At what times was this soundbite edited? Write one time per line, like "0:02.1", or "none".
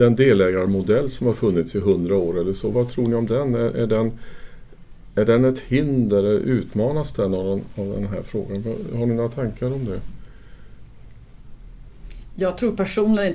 0:02.7